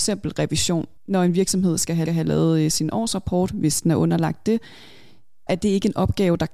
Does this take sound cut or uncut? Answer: cut